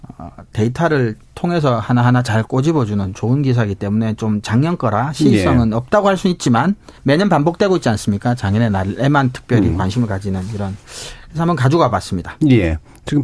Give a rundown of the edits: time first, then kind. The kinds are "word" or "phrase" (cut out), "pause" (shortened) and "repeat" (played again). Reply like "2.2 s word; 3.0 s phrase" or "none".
7.0 s pause